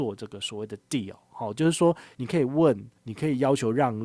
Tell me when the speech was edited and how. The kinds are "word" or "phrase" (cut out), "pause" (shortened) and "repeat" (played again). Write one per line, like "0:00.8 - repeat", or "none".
0:03.0 - pause